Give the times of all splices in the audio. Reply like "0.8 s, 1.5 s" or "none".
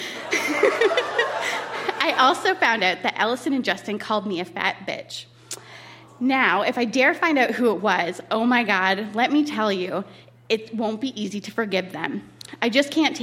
none